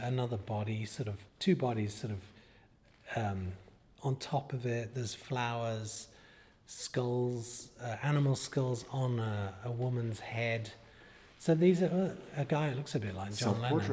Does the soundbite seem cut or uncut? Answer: cut